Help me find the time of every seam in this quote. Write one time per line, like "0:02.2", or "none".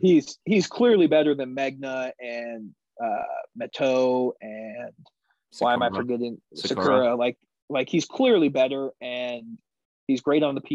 none